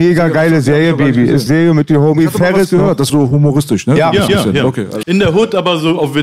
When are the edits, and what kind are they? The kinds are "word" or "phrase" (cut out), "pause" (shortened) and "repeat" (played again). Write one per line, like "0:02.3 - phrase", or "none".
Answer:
0:01.5 - phrase
0:03.1 - phrase
0:04.3 - repeat
0:05.0 - word